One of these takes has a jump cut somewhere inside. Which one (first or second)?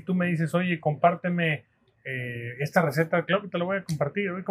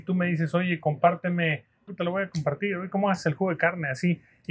second